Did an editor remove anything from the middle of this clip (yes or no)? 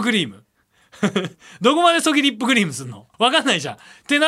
yes